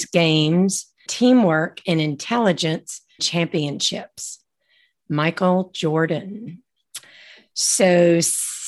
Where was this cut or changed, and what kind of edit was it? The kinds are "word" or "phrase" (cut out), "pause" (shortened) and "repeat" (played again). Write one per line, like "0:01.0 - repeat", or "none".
0:01.1 - word
0:03.2 - word